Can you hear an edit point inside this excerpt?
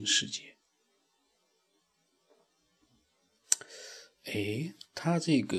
no; 0 cuts

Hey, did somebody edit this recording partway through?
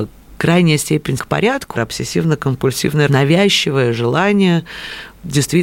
yes; 3 cuts; at 1.2 s, 1.7 s, 3.1 s

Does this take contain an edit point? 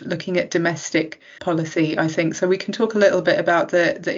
yes; 1 cut; at 1.4 s

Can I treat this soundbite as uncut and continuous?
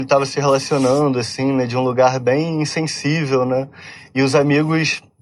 yes; 0 cuts

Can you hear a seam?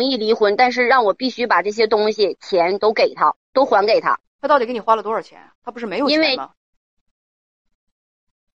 yes; 2 cuts; at 3.4 s, 5.6 s

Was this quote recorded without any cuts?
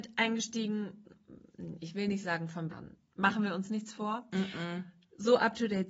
no; 1 cut; at 2.7 s

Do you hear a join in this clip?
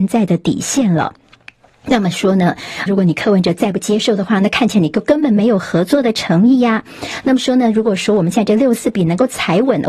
yes; 1 cut; at 2.9 s

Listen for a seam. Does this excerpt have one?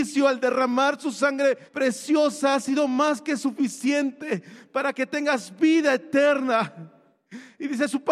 yes; 1 cut; at 1.7 s

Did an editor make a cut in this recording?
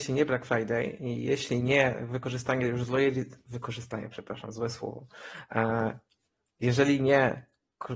no; 0 cuts

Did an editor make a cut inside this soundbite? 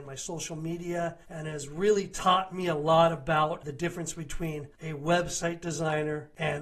yes; 1 cut; at 1.2 s

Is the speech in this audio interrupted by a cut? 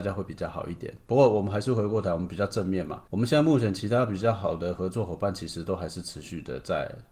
yes; 1 cut; at 3.1 s

